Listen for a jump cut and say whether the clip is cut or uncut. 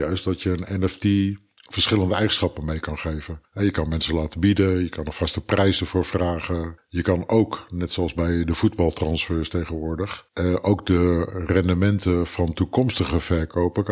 uncut